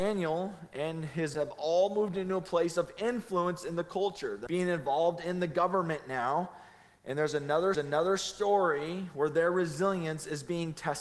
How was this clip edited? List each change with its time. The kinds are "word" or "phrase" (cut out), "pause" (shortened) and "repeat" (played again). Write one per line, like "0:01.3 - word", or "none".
0:01.3 - word
0:04.5 - word
0:07.7 - repeat